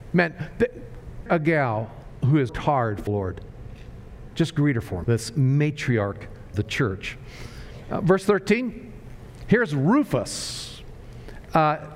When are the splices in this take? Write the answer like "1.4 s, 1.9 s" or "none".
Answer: 1.3 s, 2.5 s, 3.1 s, 5.0 s, 6.5 s